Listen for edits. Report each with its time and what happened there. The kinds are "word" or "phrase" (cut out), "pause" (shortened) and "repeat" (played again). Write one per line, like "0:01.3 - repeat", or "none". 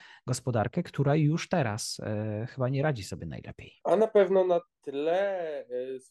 none